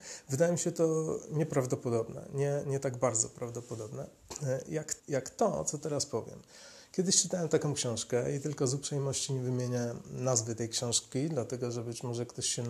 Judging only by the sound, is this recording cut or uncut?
cut